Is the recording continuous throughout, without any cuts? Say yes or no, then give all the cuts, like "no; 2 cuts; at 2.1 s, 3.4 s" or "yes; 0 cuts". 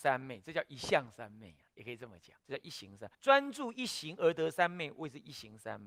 no; 3 cuts; at 1.7 s, 2.4 s, 3.1 s